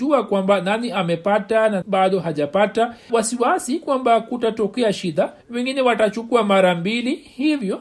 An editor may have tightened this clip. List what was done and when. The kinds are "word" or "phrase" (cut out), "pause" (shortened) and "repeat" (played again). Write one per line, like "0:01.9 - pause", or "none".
0:01.8 - word
0:03.1 - word
0:05.4 - pause

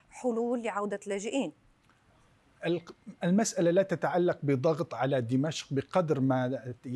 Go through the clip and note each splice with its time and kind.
none

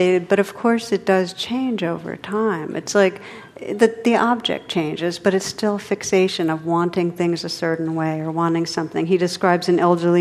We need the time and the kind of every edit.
0:03.5 - pause

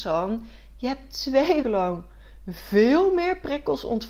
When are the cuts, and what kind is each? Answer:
0:01.6 - word

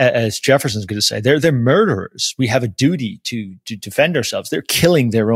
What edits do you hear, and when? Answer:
none

